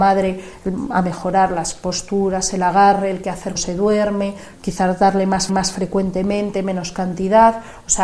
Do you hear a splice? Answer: yes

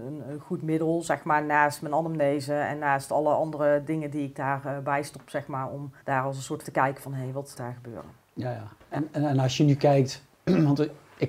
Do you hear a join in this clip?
yes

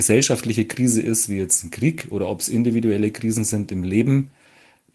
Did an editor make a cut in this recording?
no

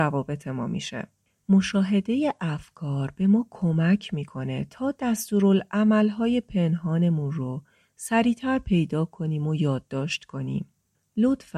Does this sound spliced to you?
no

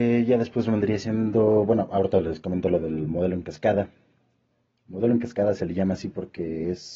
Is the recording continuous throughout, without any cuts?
yes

